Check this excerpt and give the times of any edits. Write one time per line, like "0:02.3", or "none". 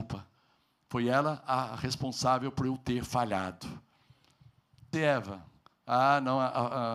0:04.9